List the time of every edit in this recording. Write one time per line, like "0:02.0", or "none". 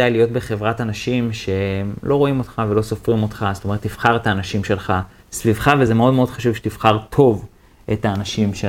none